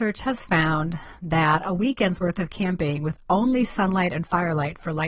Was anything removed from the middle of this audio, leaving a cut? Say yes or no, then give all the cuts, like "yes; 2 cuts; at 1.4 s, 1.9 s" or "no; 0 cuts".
no; 0 cuts